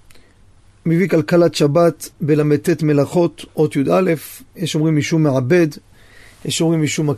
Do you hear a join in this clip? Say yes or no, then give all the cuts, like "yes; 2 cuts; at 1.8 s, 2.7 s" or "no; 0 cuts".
yes; 2 cuts; at 2.1 s, 3.5 s